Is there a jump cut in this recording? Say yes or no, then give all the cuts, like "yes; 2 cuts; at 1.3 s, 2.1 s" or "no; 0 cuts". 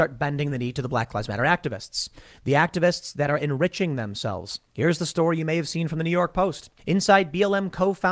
yes; 2 cuts; at 4.7 s, 6.8 s